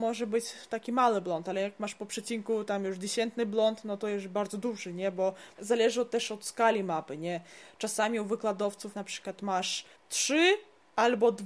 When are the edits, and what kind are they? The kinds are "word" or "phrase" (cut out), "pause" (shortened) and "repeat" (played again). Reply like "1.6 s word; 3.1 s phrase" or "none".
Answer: 5.5 s pause; 8.9 s word; 10.0 s pause